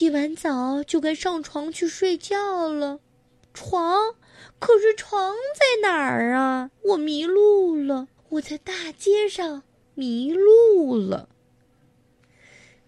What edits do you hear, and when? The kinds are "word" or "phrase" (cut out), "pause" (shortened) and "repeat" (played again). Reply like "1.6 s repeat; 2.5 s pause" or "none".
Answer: 3.1 s pause; 6.8 s pause; 8.2 s pause; 9.7 s pause